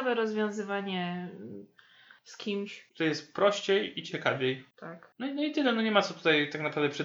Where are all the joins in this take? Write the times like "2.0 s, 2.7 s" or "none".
none